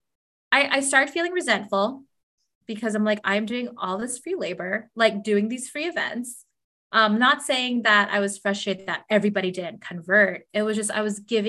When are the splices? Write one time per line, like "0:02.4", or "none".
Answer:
none